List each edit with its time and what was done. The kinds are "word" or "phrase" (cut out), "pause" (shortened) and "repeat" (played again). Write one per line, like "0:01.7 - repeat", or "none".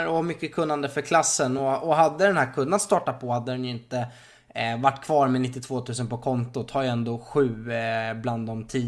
none